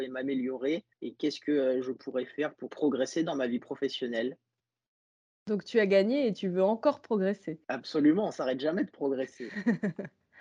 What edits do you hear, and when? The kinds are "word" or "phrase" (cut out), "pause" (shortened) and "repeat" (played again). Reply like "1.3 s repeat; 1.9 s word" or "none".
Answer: 0.9 s pause; 2.7 s word; 7.6 s pause